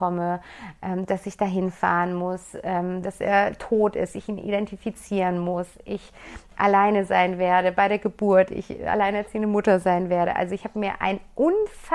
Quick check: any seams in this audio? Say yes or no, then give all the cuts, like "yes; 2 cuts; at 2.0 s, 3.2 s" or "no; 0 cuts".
no; 0 cuts